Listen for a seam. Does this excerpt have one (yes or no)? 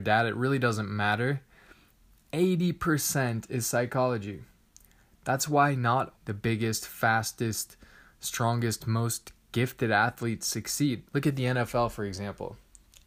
yes